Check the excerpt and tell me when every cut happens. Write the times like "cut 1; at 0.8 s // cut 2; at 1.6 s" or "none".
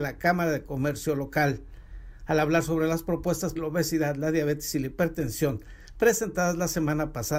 cut 1; at 3.6 s